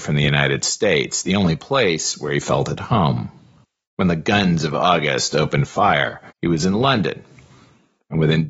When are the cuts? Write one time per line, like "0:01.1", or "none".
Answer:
0:03.6
0:06.3

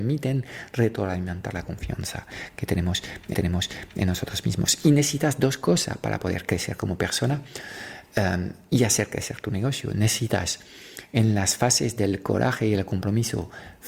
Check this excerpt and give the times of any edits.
0:03.3

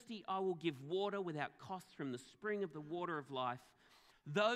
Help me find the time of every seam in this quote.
none

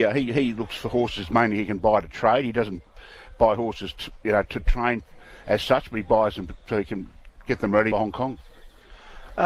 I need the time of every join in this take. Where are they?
0:04.5
0:07.9

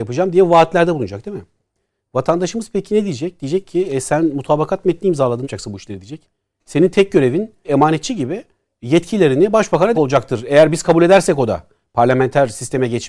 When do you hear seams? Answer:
0:05.4
0:07.6
0:09.9

